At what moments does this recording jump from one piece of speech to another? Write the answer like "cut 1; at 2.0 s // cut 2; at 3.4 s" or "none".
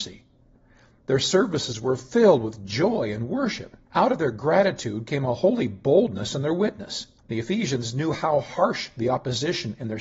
cut 1; at 3.8 s // cut 2; at 7.2 s